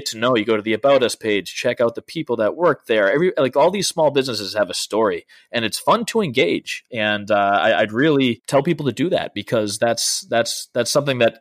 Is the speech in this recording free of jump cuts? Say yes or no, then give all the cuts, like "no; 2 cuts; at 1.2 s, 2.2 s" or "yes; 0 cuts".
yes; 0 cuts